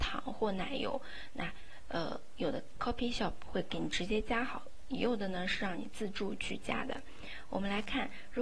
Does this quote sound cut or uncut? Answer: uncut